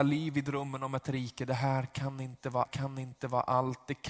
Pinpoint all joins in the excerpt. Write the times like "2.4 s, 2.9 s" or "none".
1.0 s, 2.7 s